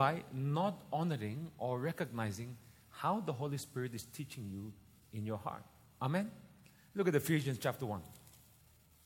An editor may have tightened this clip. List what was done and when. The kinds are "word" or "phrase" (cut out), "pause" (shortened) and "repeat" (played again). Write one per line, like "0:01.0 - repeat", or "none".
none